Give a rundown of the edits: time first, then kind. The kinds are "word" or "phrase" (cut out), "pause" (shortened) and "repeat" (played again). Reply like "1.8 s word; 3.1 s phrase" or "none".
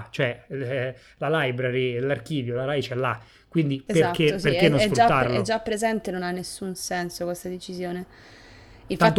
none